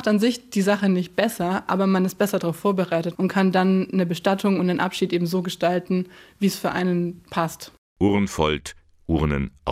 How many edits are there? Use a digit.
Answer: 0